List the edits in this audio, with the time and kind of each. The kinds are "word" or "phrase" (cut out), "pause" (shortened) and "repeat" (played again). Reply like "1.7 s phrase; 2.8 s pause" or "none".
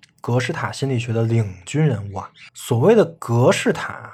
2.5 s pause